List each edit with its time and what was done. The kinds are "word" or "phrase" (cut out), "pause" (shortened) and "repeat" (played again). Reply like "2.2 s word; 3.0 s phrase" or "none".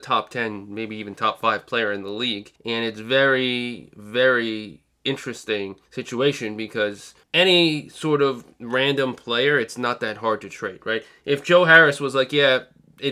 2.6 s pause; 5.9 s pause; 7.2 s pause